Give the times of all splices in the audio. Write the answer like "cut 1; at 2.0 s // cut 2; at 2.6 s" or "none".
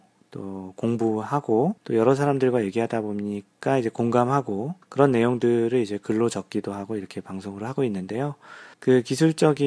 cut 1; at 1.8 s // cut 2; at 4.8 s // cut 3; at 8.7 s